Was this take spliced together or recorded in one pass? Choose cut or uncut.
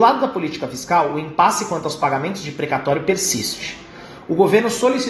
uncut